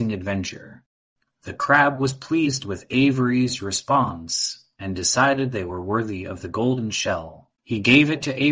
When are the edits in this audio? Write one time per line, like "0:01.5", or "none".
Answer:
0:07.6

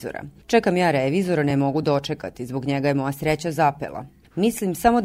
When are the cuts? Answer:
none

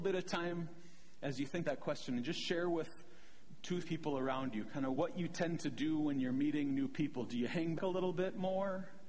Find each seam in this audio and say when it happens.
0:01.6
0:03.8
0:04.9
0:07.8

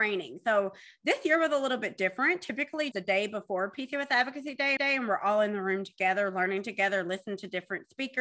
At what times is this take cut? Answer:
0:02.9
0:04.8

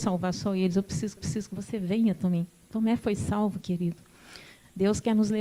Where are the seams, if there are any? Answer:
0:01.2

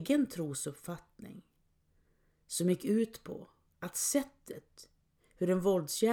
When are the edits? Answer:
none

